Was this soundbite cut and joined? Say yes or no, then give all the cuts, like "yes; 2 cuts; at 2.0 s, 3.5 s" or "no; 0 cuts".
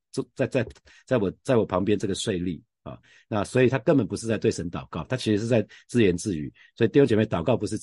no; 0 cuts